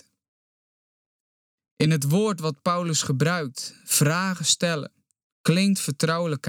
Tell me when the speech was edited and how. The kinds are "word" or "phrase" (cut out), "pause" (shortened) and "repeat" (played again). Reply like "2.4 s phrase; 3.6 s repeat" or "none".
none